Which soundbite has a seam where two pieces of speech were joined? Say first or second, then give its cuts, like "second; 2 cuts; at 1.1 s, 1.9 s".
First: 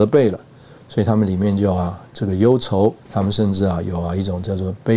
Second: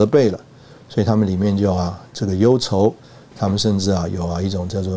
first; 1 cut; at 3.0 s